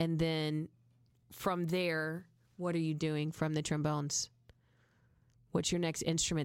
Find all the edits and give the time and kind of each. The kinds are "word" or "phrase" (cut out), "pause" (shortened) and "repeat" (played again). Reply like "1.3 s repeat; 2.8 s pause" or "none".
none